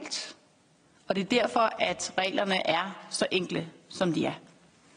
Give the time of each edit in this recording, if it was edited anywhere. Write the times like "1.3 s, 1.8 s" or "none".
none